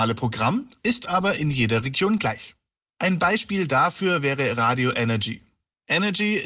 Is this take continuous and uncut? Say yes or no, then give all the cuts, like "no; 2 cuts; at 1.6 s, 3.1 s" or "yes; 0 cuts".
yes; 0 cuts